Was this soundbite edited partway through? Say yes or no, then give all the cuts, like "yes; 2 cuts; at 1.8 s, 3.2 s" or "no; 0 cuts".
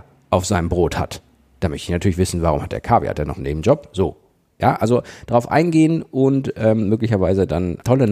no; 0 cuts